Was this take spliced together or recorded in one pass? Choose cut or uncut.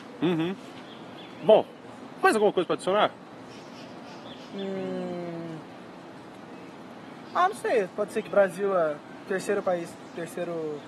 cut